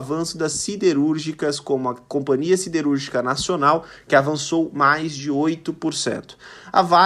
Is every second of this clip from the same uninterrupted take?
yes; 0 cuts

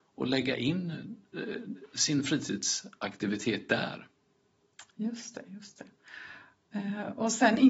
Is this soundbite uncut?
yes; 0 cuts

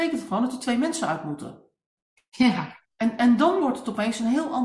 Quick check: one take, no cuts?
no; 1 cut; at 2.9 s

